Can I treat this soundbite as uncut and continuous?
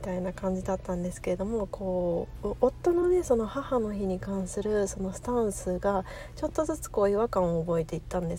yes; 0 cuts

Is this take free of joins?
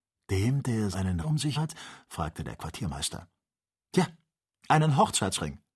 no; 3 cuts; at 0.9 s, 1.2 s, 1.6 s

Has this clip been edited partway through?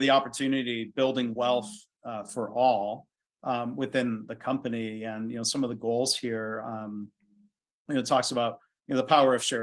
no; 0 cuts

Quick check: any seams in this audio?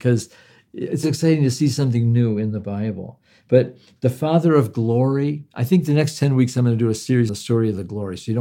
yes; 2 cuts; at 1.0 s, 7.3 s

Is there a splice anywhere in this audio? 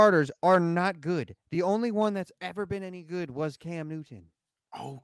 no; 0 cuts

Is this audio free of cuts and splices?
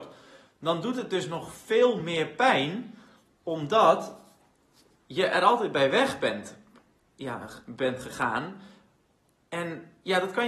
yes; 0 cuts

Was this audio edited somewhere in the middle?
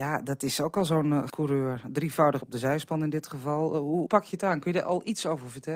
yes; 3 cuts; at 1.3 s, 2.4 s, 4.1 s

